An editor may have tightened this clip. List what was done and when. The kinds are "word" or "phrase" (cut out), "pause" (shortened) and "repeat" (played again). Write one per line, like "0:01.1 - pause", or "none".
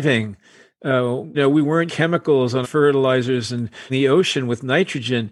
0:01.3 - word
0:01.9 - word
0:02.6 - word
0:03.9 - word